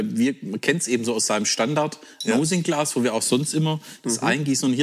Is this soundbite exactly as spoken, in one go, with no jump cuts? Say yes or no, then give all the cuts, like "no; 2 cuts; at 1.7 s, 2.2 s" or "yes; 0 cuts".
yes; 0 cuts